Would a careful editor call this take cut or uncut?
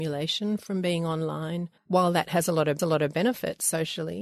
cut